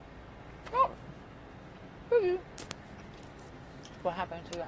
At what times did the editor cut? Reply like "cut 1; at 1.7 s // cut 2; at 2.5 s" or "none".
none